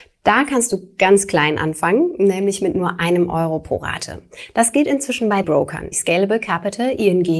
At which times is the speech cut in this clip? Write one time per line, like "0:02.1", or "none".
0:05.4
0:05.9